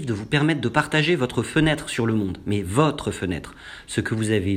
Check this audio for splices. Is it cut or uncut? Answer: uncut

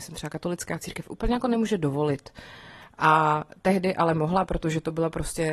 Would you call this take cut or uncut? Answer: uncut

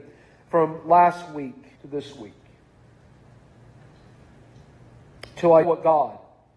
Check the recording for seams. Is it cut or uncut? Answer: cut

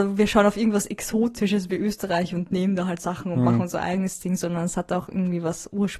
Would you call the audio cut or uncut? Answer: uncut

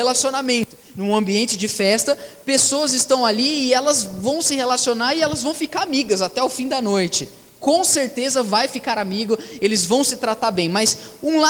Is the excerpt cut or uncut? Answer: uncut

